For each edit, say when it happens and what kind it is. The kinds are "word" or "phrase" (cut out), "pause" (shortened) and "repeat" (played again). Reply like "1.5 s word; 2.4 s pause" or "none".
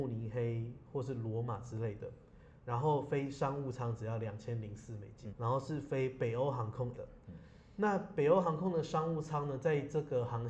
5.3 s word; 6.9 s word